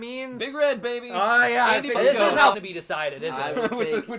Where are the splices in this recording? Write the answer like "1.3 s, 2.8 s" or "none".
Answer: 1.9 s, 2.5 s

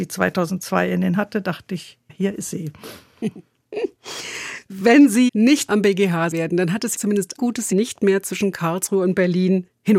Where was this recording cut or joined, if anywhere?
1.2 s, 2.1 s, 5.3 s, 5.7 s, 6.3 s, 6.9 s, 7.4 s, 7.7 s

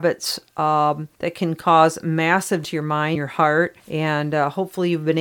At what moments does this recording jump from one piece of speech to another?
1.1 s, 2.6 s, 3.2 s, 3.8 s

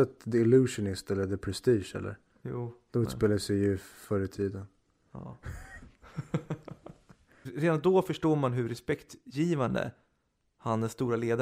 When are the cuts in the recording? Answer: none

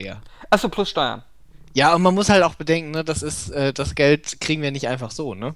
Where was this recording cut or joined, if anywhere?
none

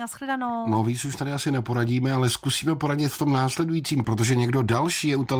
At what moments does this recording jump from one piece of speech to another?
4.0 s

